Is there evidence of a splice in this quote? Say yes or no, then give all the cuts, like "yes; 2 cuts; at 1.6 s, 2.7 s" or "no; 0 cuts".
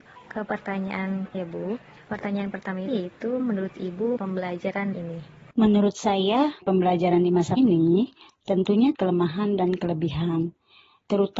yes; 8 cuts; at 1.3 s, 2.9 s, 3.4 s, 4.2 s, 4.9 s, 6.6 s, 7.6 s, 8.9 s